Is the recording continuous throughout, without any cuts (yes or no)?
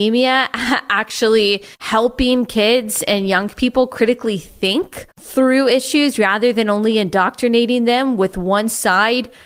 no